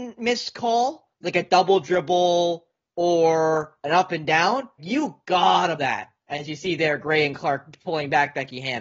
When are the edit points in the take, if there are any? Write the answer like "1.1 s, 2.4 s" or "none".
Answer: 4.8 s, 5.8 s